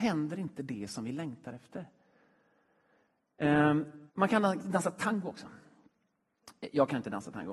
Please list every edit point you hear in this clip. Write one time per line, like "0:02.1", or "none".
0:04.1